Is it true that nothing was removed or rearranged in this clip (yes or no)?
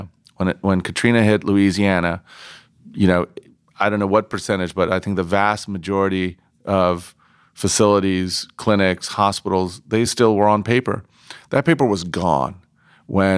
yes